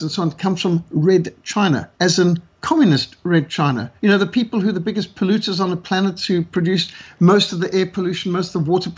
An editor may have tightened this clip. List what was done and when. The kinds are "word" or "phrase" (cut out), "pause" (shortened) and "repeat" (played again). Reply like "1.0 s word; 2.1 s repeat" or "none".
1.9 s pause; 4.0 s pause